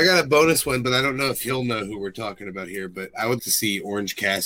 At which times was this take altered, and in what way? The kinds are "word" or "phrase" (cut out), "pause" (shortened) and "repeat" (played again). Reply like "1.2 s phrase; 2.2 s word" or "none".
3.4 s word